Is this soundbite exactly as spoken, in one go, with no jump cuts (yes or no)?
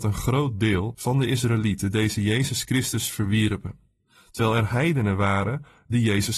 yes